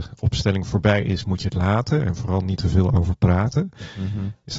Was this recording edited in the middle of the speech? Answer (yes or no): no